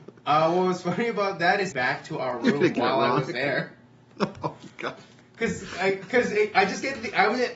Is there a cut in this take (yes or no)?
yes